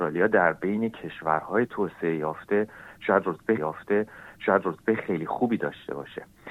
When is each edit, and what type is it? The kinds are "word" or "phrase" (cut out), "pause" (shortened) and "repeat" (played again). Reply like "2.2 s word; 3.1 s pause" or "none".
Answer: 3.6 s repeat